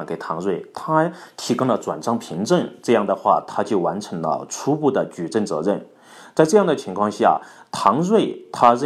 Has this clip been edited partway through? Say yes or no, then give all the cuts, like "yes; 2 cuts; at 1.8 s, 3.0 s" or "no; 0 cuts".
no; 0 cuts